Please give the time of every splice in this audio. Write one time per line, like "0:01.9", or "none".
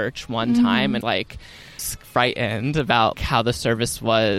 0:01.0
0:01.8
0:03.1